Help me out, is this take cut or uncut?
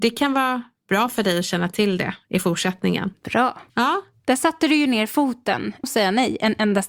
cut